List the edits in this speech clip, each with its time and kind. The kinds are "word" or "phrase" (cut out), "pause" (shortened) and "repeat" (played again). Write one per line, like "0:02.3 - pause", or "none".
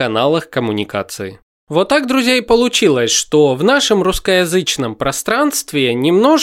none